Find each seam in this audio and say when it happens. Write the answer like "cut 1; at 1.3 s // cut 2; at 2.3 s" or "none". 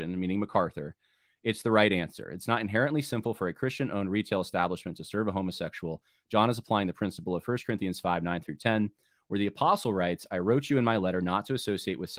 none